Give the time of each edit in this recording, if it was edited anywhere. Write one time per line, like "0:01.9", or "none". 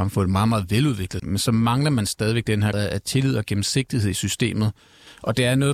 0:01.2
0:02.7